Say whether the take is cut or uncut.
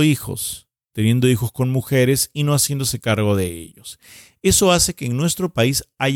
uncut